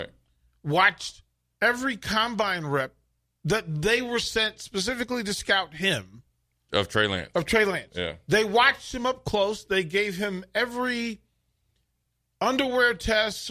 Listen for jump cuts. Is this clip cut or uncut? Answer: uncut